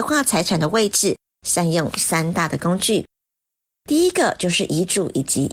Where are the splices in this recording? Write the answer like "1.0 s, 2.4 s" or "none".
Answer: none